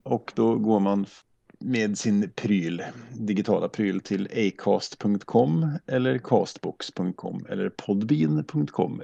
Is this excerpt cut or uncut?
uncut